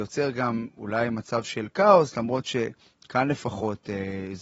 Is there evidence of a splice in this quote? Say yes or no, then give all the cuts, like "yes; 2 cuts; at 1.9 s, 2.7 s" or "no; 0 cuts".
no; 0 cuts